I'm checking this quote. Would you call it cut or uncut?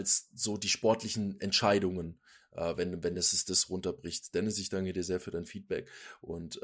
uncut